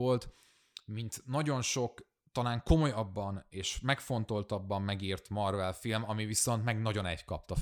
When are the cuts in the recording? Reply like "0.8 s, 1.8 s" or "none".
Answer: none